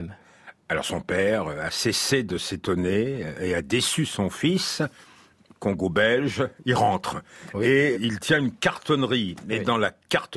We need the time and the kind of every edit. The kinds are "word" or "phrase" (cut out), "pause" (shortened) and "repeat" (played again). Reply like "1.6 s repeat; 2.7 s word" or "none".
7.9 s word